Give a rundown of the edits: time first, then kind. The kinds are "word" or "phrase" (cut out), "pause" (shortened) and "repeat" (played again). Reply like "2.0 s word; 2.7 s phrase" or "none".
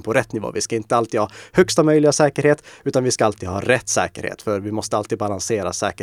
none